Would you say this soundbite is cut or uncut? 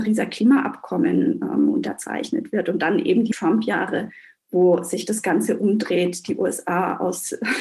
uncut